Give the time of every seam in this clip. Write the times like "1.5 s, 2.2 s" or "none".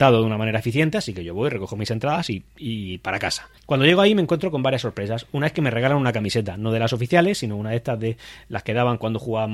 3.6 s